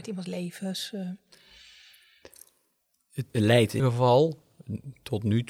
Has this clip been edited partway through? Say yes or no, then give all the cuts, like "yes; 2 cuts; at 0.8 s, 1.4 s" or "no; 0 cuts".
yes; 2 cuts; at 3.3 s, 3.8 s